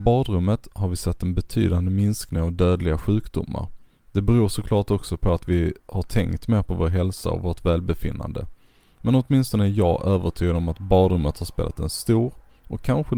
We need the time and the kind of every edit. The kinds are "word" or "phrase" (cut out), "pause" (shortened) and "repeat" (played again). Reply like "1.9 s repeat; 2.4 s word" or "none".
none